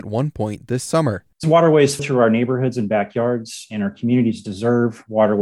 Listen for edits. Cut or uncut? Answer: cut